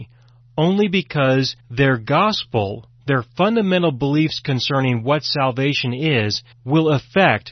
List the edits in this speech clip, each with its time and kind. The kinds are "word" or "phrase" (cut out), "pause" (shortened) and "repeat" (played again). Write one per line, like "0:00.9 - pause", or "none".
0:01.6 - pause
0:06.5 - pause